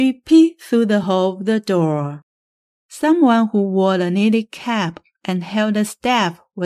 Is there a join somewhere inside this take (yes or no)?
no